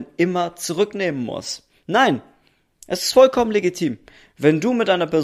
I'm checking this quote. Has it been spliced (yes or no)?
no